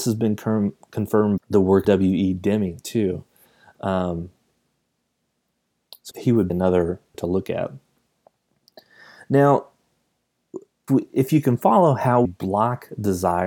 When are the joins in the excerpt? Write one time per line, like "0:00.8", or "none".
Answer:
0:01.4
0:01.8
0:06.1
0:06.5
0:07.1
0:10.9
0:12.2